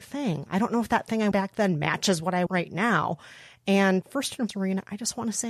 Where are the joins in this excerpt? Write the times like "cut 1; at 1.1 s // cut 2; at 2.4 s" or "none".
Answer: cut 1; at 1.3 s // cut 2; at 2.5 s // cut 3; at 4.0 s // cut 4; at 4.5 s